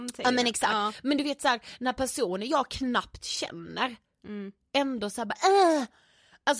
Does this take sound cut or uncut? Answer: uncut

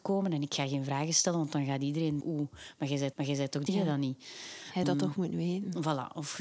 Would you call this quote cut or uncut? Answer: cut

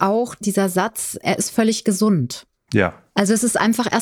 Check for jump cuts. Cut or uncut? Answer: uncut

